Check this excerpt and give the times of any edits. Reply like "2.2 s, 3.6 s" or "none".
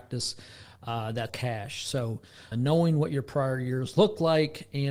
1.3 s, 2.5 s